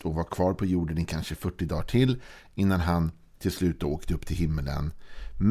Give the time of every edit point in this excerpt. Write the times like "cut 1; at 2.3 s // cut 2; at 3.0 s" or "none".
none